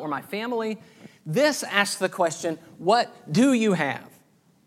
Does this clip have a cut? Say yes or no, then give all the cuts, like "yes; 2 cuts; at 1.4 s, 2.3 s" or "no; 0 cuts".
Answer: no; 0 cuts